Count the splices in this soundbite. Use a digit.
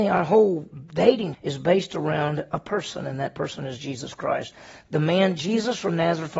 1